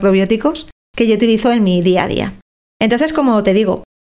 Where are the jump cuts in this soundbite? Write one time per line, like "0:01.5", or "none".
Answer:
none